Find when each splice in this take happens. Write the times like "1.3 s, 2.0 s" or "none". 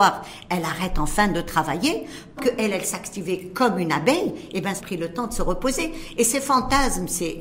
2.4 s, 4.8 s